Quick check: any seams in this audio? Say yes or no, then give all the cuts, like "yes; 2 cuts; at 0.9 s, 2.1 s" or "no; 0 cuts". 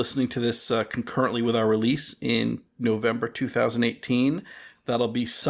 no; 0 cuts